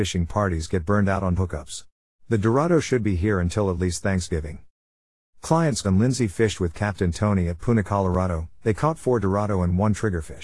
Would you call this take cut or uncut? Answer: cut